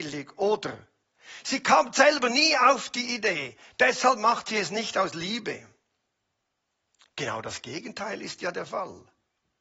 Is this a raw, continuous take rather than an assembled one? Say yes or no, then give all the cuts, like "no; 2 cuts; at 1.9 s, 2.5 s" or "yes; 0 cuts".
yes; 0 cuts